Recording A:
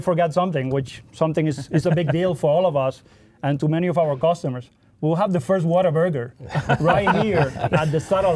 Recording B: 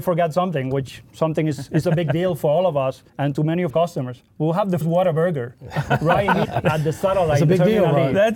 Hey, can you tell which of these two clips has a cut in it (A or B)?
B